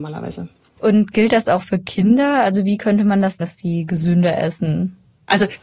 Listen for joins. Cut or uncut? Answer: cut